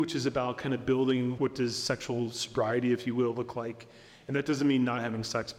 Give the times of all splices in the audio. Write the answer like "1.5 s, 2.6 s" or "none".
1.4 s